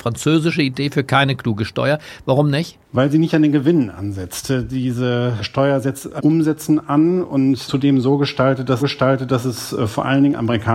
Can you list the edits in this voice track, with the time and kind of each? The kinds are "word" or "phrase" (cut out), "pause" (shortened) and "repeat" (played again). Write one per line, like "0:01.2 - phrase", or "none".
0:02.8 - pause
0:06.2 - word
0:07.7 - word
0:08.8 - repeat